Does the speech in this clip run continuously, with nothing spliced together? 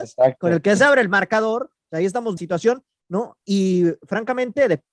no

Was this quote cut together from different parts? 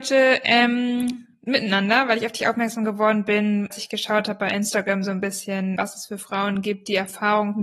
yes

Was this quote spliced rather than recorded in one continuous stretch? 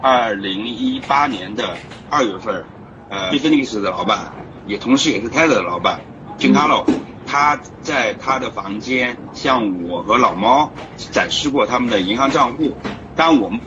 yes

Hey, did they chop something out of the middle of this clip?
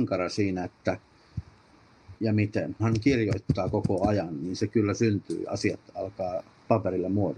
yes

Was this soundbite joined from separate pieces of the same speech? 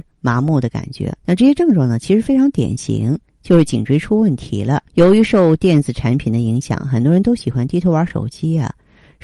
yes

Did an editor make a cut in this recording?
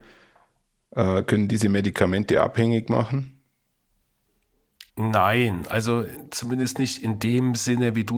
yes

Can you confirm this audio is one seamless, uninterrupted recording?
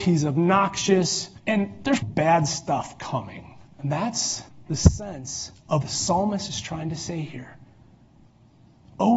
no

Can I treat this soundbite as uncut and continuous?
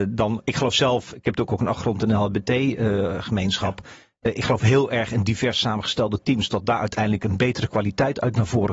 yes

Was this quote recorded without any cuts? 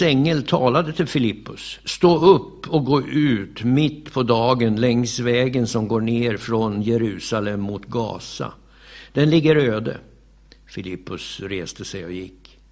yes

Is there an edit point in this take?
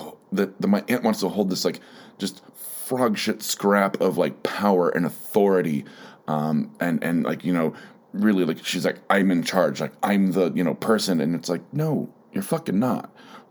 no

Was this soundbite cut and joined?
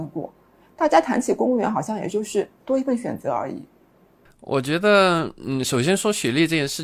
yes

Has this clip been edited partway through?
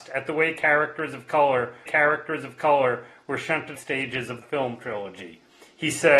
yes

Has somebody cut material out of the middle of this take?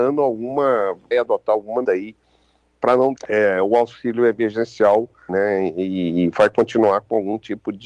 yes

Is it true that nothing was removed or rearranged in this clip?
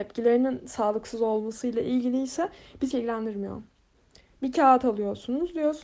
no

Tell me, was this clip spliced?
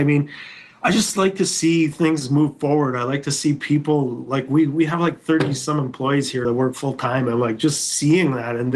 yes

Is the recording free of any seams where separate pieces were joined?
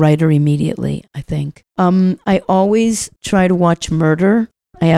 no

